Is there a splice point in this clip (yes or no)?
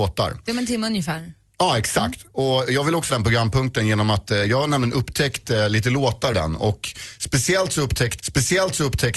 yes